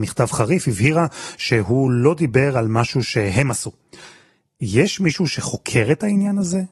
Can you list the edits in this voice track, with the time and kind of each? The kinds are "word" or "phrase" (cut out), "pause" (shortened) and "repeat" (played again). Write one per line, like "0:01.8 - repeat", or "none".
none